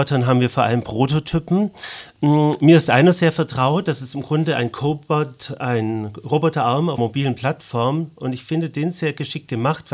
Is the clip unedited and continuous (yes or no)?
no